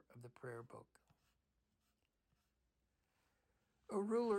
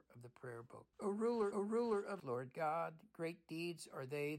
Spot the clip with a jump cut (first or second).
second